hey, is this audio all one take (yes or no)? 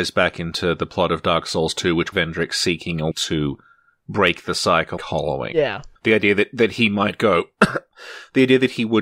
no